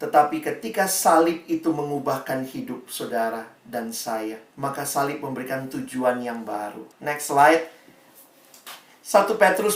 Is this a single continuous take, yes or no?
no